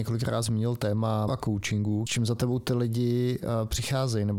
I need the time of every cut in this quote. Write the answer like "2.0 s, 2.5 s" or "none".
1.3 s, 2.1 s